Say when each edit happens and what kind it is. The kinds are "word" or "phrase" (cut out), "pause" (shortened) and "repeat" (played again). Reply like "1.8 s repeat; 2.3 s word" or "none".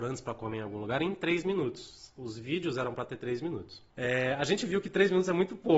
3.9 s pause